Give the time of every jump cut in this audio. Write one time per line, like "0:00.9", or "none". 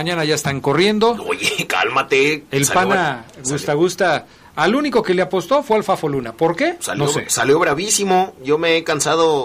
none